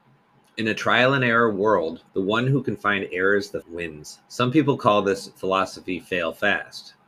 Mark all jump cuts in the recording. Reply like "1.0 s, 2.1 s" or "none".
2.1 s, 3.6 s, 4.3 s